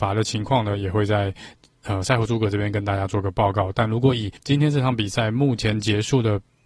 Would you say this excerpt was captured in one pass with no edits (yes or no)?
no